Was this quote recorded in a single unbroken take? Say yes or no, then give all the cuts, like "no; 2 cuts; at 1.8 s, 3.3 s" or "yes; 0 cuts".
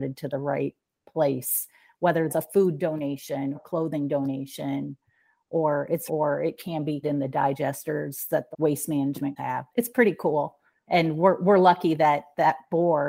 no; 7 cuts; at 2.3 s, 3.5 s, 6.1 s, 7.0 s, 8.5 s, 9.4 s, 9.7 s